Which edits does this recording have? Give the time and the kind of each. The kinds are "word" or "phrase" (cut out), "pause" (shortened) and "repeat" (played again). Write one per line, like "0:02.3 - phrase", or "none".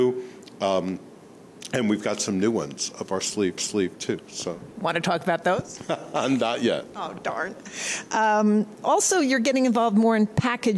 0:03.6 - repeat